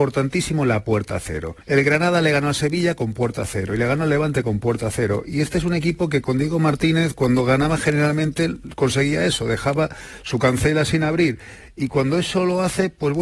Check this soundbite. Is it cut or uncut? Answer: cut